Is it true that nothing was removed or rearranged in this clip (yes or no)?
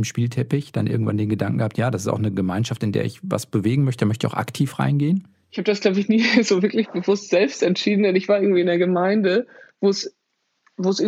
yes